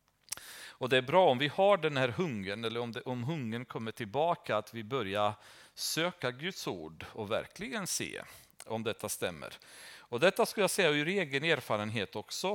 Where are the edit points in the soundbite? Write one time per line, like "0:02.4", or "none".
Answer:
none

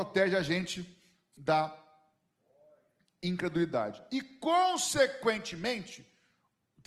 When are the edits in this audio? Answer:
none

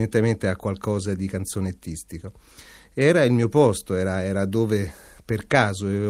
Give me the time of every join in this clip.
none

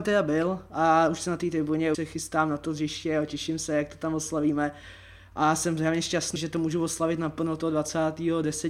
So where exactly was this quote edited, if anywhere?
0:01.9
0:06.4

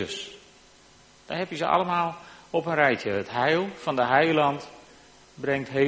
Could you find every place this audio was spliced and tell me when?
none

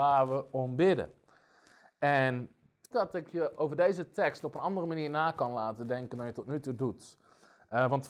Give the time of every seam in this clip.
0:02.9

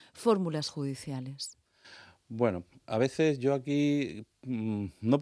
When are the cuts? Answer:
none

